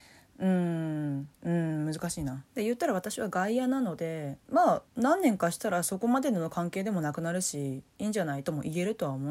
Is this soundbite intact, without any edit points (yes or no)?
no